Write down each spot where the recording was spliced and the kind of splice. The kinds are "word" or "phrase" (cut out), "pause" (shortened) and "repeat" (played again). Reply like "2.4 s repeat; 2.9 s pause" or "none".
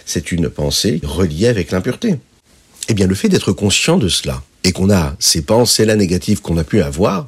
1.0 s word; 4.5 s pause